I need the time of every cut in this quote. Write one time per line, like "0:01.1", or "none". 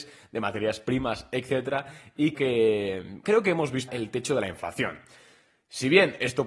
0:02.3
0:03.2
0:03.9